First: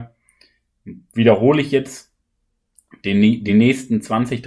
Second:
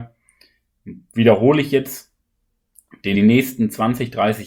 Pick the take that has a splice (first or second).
second